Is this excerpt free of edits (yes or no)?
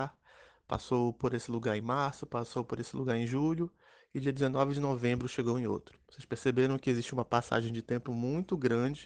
yes